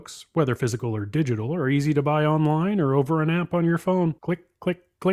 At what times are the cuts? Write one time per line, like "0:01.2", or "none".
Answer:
0:04.2